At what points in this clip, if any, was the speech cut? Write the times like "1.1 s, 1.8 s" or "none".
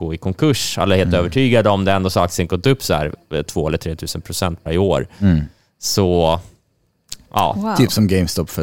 3.5 s, 4.7 s

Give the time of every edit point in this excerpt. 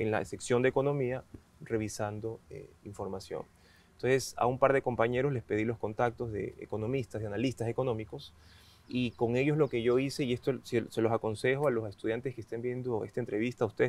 8.8 s

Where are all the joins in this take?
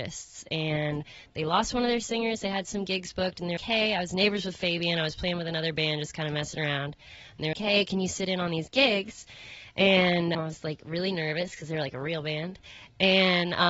3.6 s, 7.5 s, 10.3 s

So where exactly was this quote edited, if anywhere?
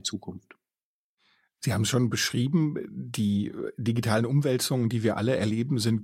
none

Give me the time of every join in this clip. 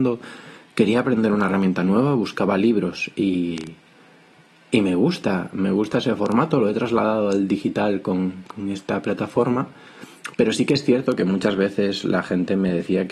none

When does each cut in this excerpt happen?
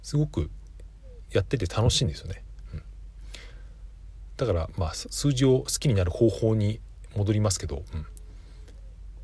none

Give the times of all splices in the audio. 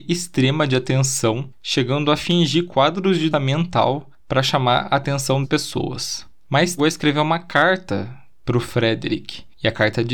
3.3 s, 5.4 s, 6.8 s

